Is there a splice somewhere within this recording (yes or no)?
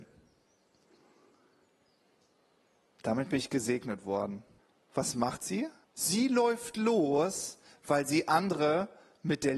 yes